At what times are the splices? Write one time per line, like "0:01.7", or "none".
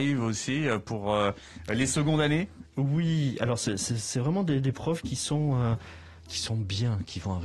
none